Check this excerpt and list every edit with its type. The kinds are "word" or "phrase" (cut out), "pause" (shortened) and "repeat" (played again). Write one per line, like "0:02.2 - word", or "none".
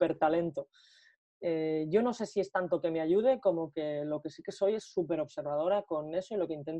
none